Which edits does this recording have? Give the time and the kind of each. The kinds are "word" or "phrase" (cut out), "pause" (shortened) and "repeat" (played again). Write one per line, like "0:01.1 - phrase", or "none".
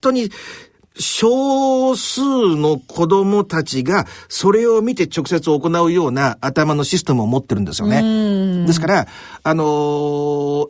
0:00.9 - phrase